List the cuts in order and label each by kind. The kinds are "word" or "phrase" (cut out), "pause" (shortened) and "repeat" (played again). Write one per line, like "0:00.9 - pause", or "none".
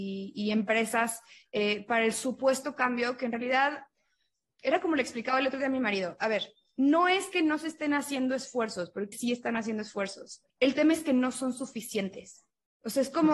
0:06.6 - pause
0:09.1 - phrase
0:10.5 - pause